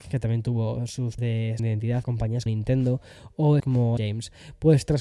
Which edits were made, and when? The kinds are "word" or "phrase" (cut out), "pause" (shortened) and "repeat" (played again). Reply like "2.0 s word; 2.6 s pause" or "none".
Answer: 1.2 s word; 1.6 s word; 2.0 s word; 2.5 s word; 3.6 s word; 4.0 s word